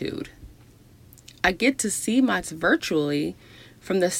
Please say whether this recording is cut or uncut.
cut